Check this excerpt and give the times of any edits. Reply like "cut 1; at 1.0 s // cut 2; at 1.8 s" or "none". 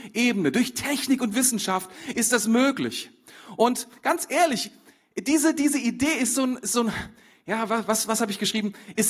none